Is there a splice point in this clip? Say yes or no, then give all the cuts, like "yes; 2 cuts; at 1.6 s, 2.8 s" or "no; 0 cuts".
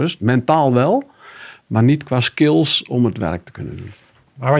no; 0 cuts